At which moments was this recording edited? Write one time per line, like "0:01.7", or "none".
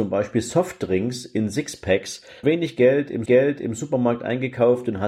0:02.4
0:03.3

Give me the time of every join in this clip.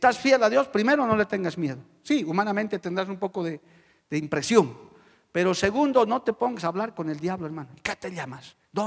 none

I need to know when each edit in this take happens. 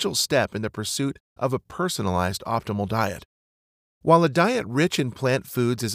none

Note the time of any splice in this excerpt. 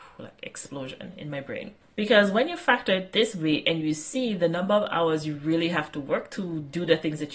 0:01.8

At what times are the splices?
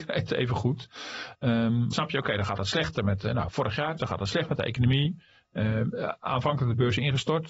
0:01.9
0:04.0

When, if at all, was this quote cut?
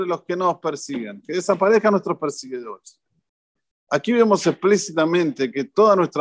none

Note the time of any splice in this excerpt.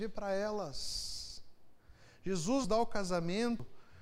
0:02.6

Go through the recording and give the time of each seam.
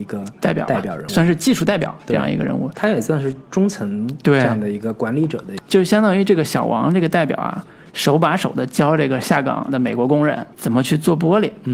0:01.1
0:05.6
0:10.5

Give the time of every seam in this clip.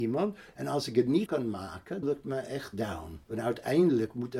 0:01.3
0:02.0
0:03.2

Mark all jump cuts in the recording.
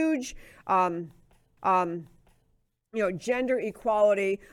0:01.6

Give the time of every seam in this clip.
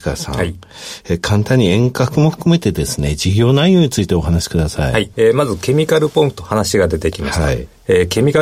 0:05.1

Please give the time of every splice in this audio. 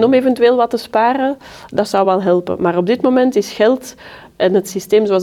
none

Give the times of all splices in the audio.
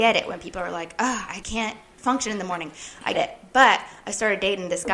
0:01.4
0:03.1

